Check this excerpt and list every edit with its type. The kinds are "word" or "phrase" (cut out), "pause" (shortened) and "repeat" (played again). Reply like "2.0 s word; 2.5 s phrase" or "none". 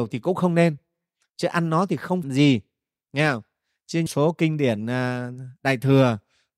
2.2 s word; 4.1 s word